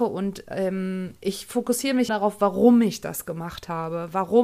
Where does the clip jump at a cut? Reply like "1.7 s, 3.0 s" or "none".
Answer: 2.1 s